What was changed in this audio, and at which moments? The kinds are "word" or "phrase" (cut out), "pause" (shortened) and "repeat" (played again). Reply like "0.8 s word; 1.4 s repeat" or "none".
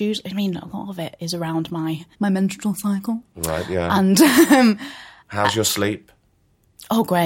2.1 s pause